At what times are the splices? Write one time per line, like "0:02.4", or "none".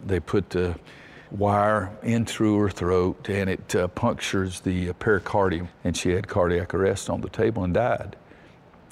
0:01.3